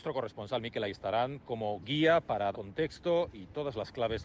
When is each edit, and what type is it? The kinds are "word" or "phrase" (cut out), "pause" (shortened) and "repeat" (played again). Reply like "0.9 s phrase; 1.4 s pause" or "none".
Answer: 2.5 s word

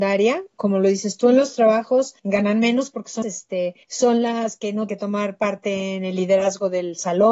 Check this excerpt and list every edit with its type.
2.2 s pause; 3.2 s word; 3.8 s pause; 4.9 s word

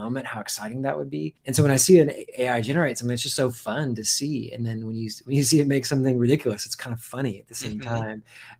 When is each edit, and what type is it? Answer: 1.4 s pause

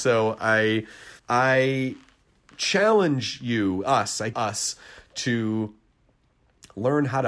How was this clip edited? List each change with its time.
1.2 s pause; 4.3 s word

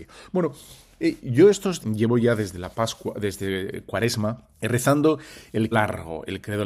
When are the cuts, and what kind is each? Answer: 1.8 s word; 4.5 s pause; 5.7 s word

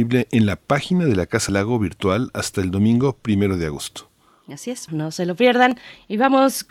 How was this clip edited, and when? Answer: 1.5 s word; 4.9 s word

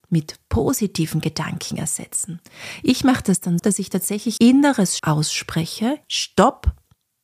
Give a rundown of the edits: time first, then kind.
3.6 s word; 4.4 s word; 5.0 s word; 6.0 s word

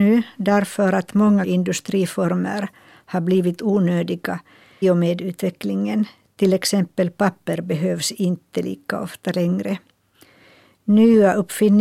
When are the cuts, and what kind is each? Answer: 1.4 s word; 4.8 s word

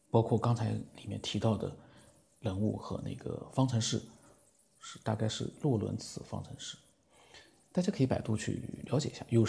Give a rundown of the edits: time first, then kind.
none

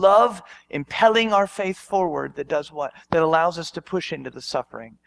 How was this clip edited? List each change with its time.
none

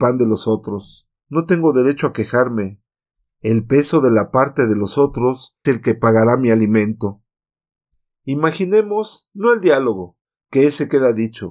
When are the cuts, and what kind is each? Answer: 1.2 s pause; 5.7 s word

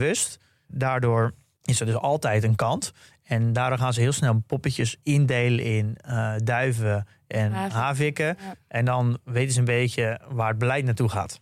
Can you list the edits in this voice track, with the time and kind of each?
5.0 s pause

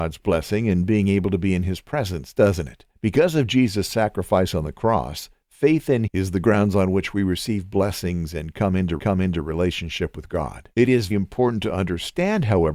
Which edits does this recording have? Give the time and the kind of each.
2.9 s pause; 6.1 s word; 9.0 s repeat; 10.7 s pause; 11.1 s word

